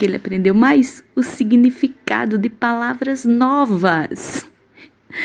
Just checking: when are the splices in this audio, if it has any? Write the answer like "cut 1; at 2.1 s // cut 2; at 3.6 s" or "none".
none